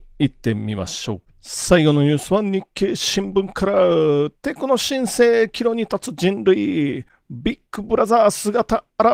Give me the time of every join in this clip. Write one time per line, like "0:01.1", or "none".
0:04.4